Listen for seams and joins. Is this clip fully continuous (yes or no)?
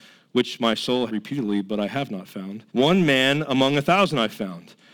no